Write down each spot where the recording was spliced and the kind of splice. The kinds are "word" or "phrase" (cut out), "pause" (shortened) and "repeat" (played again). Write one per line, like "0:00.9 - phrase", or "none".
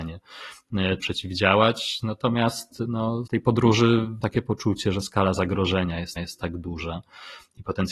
0:01.0 - word
0:03.3 - word
0:04.2 - word
0:06.2 - repeat